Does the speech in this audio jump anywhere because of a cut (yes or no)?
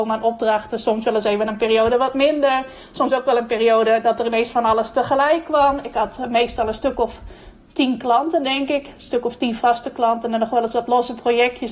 no